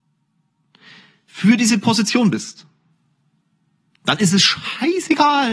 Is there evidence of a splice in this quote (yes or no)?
no